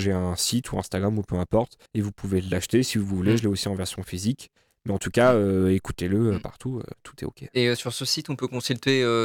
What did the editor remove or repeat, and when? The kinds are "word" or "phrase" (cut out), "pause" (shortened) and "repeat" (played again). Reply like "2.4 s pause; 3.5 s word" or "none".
1.9 s pause